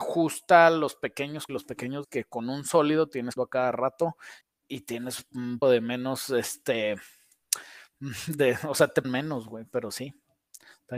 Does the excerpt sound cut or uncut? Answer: cut